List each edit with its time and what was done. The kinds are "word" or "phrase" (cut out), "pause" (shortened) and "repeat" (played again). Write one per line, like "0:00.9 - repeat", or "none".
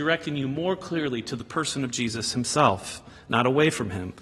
none